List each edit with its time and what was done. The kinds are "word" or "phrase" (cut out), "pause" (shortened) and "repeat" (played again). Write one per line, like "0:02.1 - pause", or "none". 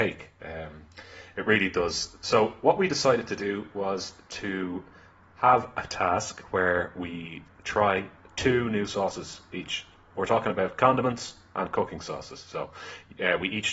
none